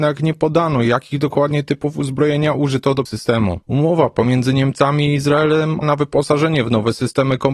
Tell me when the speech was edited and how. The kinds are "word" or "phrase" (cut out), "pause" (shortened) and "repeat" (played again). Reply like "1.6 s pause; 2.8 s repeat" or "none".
3.1 s phrase; 3.6 s pause; 5.8 s word

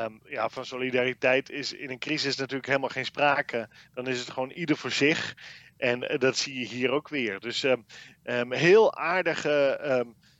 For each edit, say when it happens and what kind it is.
none

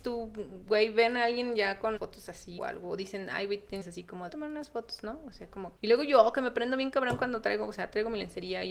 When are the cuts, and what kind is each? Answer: 2.0 s word; 2.6 s word; 3.8 s phrase; 4.3 s phrase; 5.8 s pause

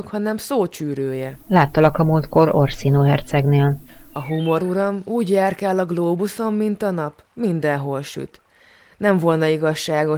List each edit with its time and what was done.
none

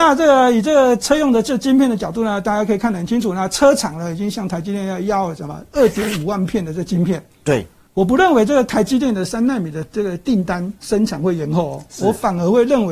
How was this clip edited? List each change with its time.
none

